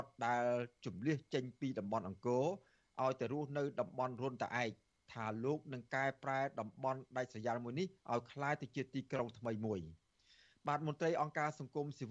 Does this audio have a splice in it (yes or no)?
no